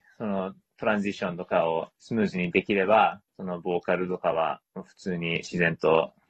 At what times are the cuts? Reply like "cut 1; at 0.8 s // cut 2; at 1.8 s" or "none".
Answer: cut 1; at 1.9 s // cut 2; at 3.3 s